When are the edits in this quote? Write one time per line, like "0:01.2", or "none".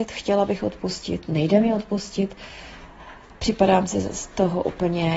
none